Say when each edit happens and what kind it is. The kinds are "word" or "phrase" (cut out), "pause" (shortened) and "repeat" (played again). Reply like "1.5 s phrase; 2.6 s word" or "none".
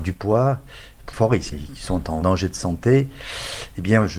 1.1 s phrase; 1.5 s word; 2.2 s word